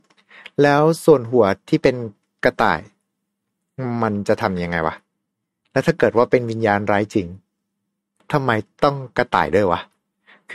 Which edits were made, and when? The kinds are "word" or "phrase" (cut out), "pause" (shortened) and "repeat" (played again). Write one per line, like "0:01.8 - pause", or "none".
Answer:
none